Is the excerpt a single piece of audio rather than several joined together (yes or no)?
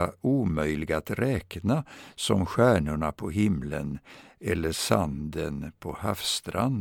yes